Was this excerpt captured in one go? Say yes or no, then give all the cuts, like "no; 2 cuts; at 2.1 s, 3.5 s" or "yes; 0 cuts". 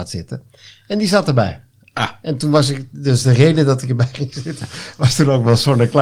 yes; 0 cuts